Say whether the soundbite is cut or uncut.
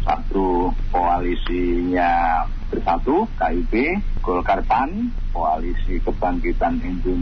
cut